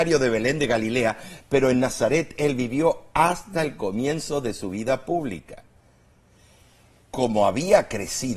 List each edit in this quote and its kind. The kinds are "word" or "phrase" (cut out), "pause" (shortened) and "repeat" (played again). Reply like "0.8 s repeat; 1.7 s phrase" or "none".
none